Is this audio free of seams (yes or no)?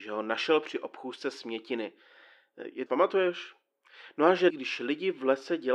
no